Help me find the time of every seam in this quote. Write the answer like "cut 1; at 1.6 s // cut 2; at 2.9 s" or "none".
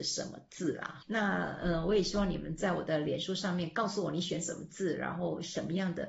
cut 1; at 1.0 s